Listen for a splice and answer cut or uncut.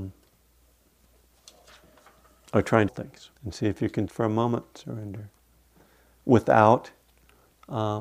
cut